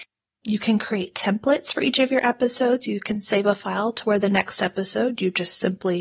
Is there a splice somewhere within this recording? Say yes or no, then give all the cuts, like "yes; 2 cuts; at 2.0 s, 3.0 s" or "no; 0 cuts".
no; 0 cuts